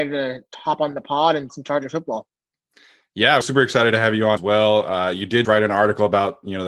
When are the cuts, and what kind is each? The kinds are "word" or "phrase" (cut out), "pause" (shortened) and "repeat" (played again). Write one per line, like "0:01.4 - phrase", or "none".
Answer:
0:01.5 - word
0:03.4 - word
0:04.4 - word
0:05.4 - word